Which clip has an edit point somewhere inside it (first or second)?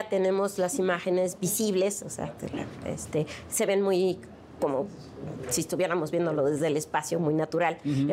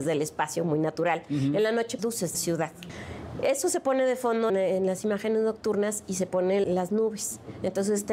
second